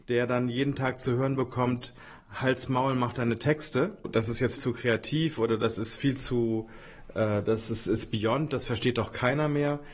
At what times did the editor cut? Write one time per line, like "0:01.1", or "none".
0:02.2
0:04.6